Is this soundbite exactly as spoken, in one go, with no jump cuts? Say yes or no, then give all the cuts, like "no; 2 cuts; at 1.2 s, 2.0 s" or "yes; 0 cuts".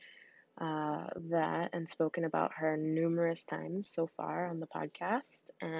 yes; 0 cuts